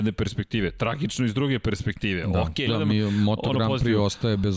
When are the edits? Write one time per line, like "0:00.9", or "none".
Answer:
0:02.7